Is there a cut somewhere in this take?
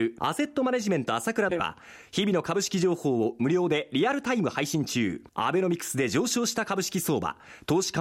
yes; 1 cut; at 5.3 s

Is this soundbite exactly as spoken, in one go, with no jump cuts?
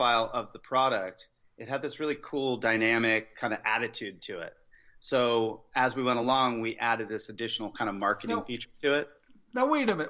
yes; 0 cuts

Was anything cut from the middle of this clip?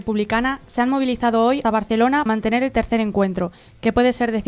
yes; 2 cuts; at 1.6 s, 2.3 s

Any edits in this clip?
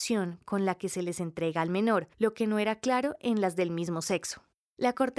yes; 1 cut; at 2.1 s

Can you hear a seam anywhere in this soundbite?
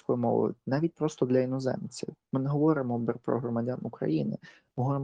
no; 0 cuts

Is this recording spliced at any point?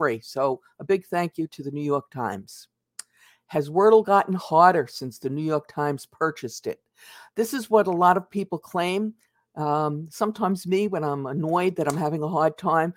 no; 0 cuts

